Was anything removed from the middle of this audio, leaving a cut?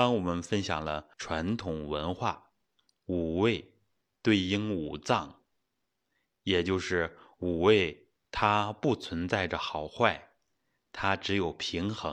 yes; 2 cuts; at 1.1 s, 8.2 s

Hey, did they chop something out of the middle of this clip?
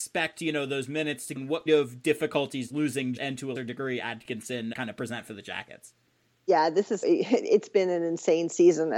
yes; 7 cuts; at 1.4 s, 1.7 s, 2.7 s, 3.2 s, 3.6 s, 4.7 s, 7.0 s

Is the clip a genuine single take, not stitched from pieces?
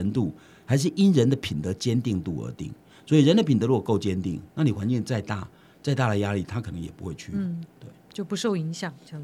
yes; 0 cuts

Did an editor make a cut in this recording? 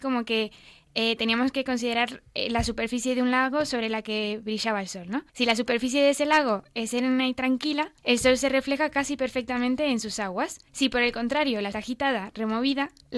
yes; 4 cuts; at 5.3 s, 8.0 s, 10.7 s, 11.7 s

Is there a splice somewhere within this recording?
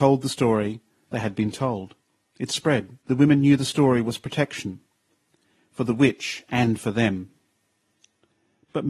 yes; 1 cut; at 3.0 s

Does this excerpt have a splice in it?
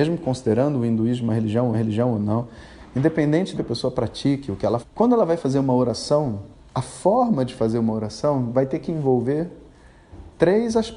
yes; 4 cuts; at 1.7 s, 3.6 s, 4.8 s, 6.5 s

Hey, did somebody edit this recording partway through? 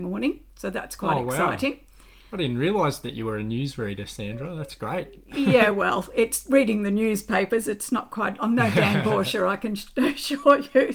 no; 0 cuts

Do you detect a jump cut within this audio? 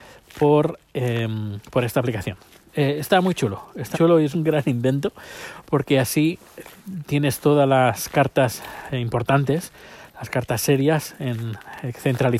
yes; 2 cuts; at 3.9 s, 4.3 s

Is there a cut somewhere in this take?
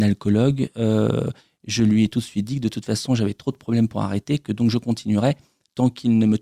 no; 0 cuts

